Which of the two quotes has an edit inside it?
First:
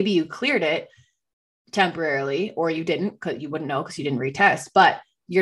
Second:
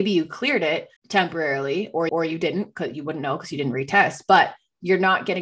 second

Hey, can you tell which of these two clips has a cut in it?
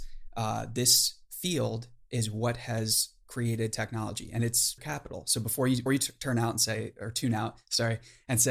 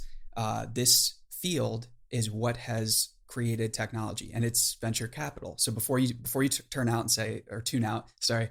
first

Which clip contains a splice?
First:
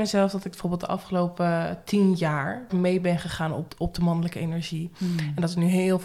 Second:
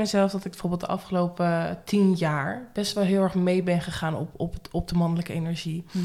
first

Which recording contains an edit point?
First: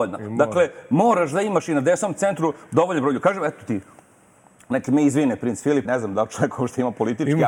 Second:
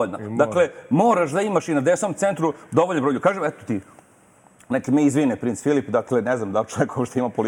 first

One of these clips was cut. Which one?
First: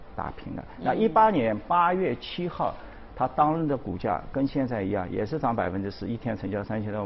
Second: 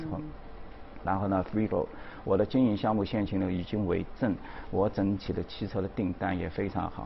second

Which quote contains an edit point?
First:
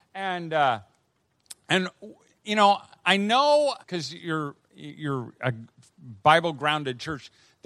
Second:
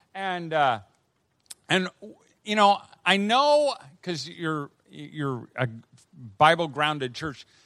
first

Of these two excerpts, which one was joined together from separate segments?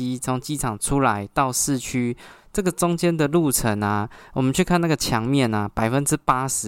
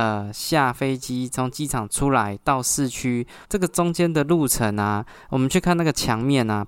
second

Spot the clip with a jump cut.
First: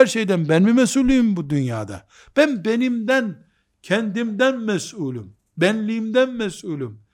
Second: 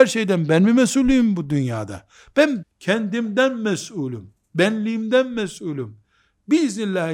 second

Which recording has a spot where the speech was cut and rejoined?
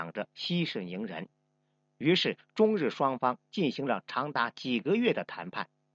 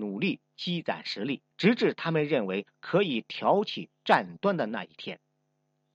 second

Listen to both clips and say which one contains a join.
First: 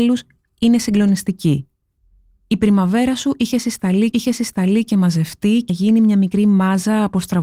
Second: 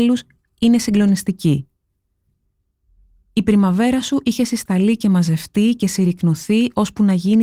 first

